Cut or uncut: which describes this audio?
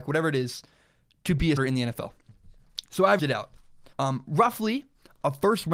cut